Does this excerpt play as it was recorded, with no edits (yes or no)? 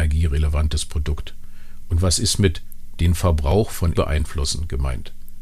no